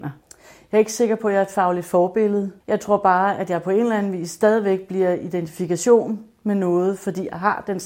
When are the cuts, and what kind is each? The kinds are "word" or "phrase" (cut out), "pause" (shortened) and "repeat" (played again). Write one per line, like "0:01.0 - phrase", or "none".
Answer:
0:02.6 - pause